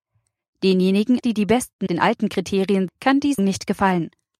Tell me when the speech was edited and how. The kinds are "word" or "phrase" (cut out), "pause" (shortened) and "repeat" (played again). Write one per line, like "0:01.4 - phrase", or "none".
0:01.2 - word
0:01.9 - word
0:02.9 - word
0:03.4 - word